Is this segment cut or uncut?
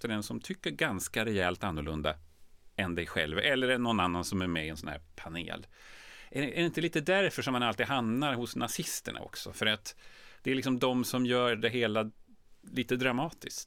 uncut